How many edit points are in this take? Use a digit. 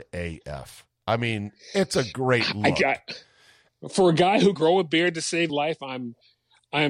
3